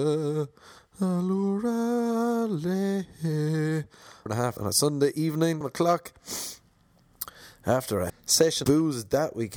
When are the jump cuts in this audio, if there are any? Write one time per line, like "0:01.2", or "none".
0:04.3
0:04.6
0:05.6
0:08.1
0:08.6